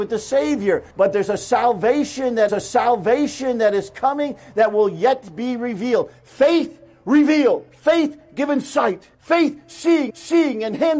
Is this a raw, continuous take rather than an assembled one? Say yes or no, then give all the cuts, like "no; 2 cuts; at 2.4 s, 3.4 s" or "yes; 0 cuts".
no; 5 cuts; at 0.9 s, 2.5 s, 7.7 s, 9.1 s, 10.1 s